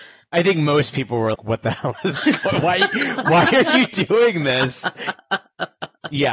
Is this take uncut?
no; 1 cut; at 1.3 s

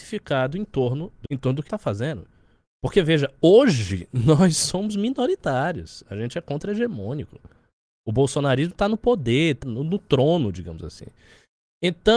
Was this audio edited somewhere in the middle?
yes; 3 cuts; at 1.3 s, 1.7 s, 9.6 s

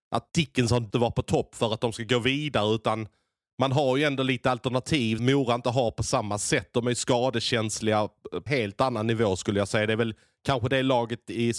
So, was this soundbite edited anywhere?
yes; 3 cuts; at 0.9 s, 5.2 s, 8.5 s

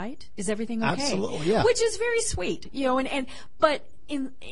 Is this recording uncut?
yes; 0 cuts

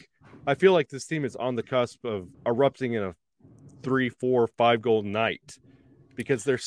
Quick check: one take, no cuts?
no; 1 cut; at 2.3 s

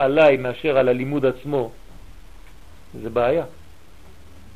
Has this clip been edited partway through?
no; 0 cuts

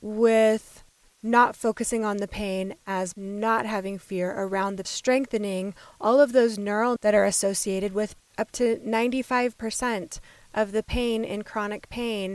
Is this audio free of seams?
no; 4 cuts; at 3.1 s, 4.8 s, 7.0 s, 8.2 s

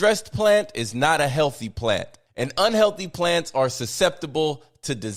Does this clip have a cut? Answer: no; 0 cuts

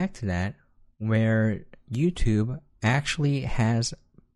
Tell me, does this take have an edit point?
no; 0 cuts

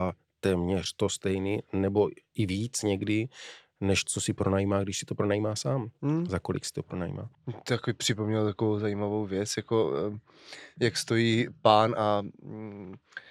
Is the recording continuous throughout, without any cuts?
yes; 0 cuts

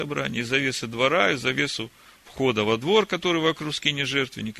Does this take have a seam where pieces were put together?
no; 0 cuts

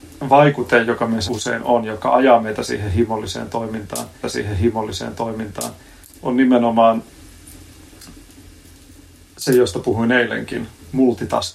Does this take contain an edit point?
yes; 2 cuts; at 1.3 s, 4.2 s

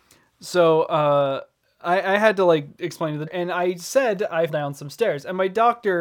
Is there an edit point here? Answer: yes; 2 cuts; at 3.3 s, 4.5 s

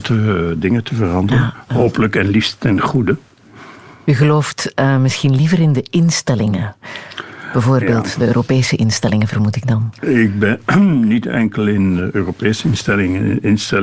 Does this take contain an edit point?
no; 0 cuts

